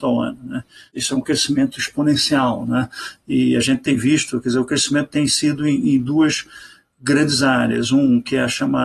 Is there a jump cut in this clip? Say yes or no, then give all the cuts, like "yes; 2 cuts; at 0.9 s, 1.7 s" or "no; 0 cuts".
no; 0 cuts